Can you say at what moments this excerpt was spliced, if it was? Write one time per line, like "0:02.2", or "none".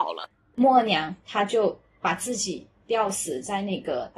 none